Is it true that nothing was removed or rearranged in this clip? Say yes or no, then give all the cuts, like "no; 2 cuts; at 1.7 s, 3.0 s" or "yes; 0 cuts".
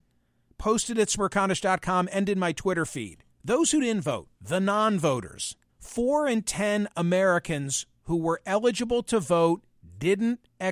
no; 3 cuts; at 3.3 s, 4.4 s, 5.7 s